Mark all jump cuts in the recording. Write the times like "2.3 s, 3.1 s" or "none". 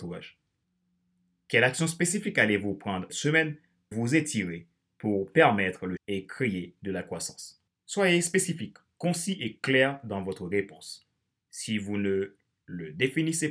3.1 s, 3.9 s, 6.0 s, 7.7 s